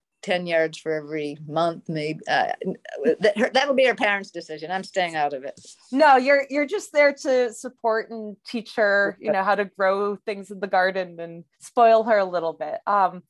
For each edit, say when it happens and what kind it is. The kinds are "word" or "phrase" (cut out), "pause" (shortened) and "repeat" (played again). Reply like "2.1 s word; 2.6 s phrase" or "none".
11.5 s pause